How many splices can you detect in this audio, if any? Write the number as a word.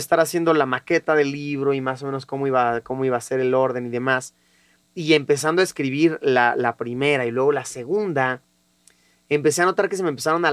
zero